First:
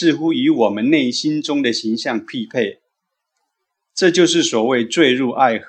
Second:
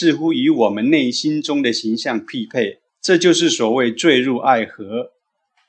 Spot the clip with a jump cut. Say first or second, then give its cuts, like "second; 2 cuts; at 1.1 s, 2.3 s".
second; 1 cut; at 2.9 s